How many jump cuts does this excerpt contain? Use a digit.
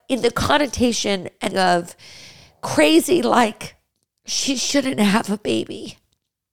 1